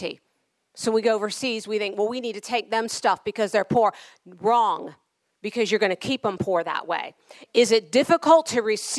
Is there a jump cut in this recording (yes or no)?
no